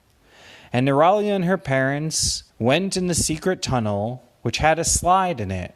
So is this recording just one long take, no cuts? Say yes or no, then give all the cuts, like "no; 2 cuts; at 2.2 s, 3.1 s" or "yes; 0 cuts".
no; 1 cut; at 2.5 s